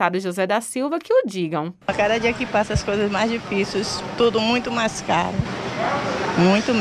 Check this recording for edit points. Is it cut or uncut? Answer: cut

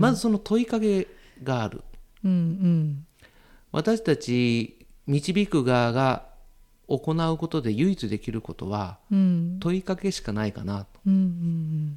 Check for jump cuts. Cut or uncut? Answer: uncut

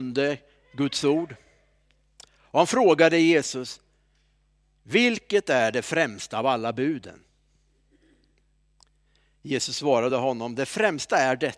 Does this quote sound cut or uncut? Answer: uncut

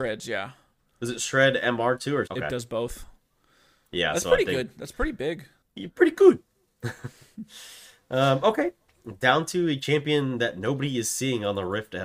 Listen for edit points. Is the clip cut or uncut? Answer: cut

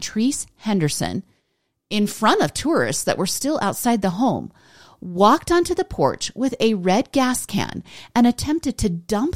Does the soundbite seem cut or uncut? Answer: uncut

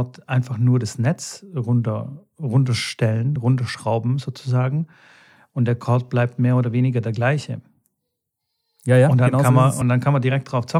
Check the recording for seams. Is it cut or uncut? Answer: uncut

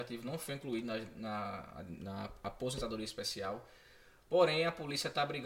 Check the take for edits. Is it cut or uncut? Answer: uncut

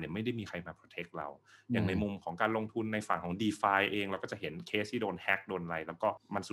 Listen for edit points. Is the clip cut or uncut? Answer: uncut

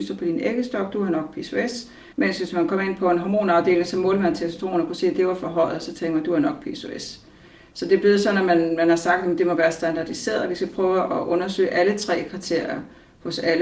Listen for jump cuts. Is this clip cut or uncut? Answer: cut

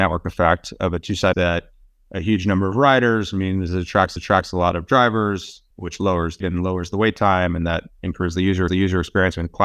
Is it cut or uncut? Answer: cut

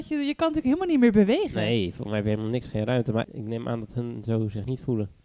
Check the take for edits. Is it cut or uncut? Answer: cut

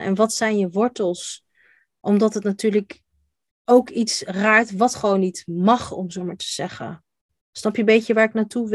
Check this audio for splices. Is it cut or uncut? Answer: uncut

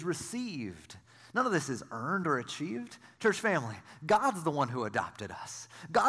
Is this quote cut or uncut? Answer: uncut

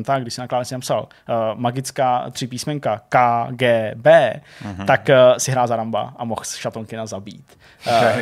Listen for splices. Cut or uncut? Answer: uncut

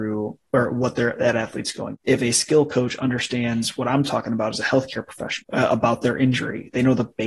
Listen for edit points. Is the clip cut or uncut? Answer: uncut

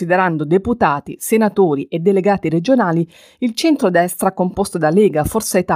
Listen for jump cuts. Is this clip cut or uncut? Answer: uncut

